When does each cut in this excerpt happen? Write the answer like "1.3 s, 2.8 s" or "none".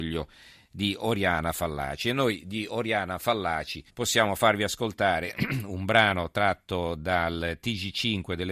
3.9 s